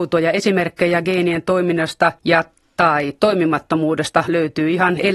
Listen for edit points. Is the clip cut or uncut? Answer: cut